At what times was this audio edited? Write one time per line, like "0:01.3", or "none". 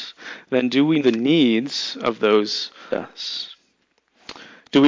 0:01.0
0:02.9